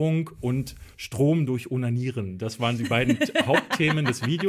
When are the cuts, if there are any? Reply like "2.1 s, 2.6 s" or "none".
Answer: none